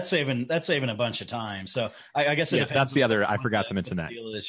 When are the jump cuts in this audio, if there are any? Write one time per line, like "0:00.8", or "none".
none